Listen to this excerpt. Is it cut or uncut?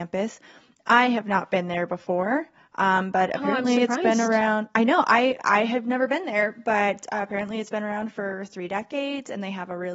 uncut